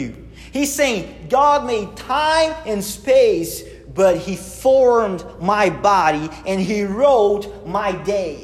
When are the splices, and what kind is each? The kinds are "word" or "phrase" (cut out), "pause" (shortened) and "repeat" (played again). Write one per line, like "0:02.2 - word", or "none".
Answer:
none

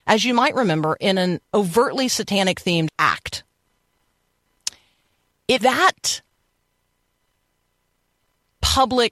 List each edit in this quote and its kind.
0:01.4 - pause
0:02.9 - word
0:05.6 - phrase

